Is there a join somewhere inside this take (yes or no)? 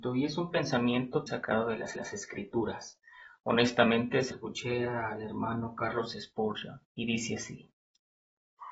yes